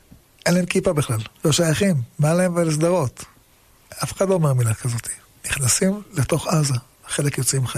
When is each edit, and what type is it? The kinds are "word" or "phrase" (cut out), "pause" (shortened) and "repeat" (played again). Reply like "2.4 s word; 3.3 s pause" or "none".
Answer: 1.3 s pause